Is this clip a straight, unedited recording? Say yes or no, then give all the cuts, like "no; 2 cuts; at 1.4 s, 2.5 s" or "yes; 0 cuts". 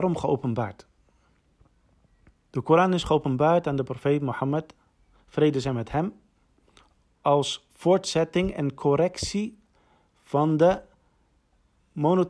yes; 0 cuts